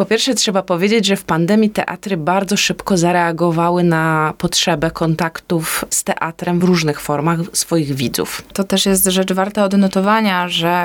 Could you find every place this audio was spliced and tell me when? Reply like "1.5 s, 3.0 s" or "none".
none